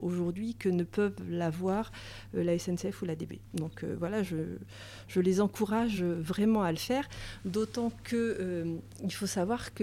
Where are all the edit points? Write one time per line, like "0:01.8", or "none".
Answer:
none